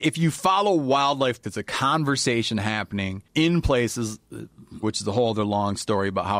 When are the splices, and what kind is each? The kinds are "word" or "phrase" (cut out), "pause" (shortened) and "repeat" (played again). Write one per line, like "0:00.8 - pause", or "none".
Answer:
0:01.4 - word
0:03.3 - pause
0:04.8 - word